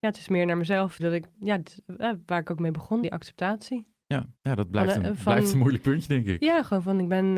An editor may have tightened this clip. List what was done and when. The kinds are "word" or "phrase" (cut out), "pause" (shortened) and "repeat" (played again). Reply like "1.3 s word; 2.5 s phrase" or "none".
1.0 s word; 1.3 s word; 3.0 s word; 4.4 s pause